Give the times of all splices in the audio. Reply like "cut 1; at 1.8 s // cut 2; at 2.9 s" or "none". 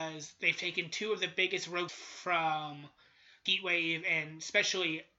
cut 1; at 1.9 s // cut 2; at 3.5 s